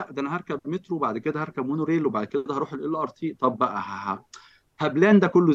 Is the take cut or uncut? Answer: uncut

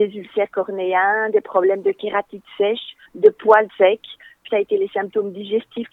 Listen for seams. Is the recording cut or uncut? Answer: cut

